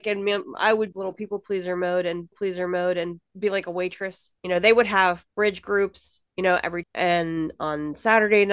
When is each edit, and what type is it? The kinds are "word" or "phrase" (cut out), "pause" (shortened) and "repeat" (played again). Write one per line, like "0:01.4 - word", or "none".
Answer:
0:00.9 - word
0:02.3 - repeat
0:04.4 - pause
0:05.3 - pause
0:06.3 - pause
0:06.8 - word